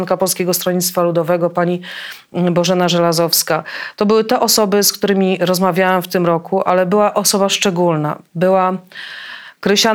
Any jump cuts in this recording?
no; 0 cuts

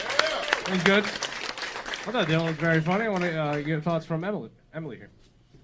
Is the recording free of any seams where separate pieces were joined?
yes; 0 cuts

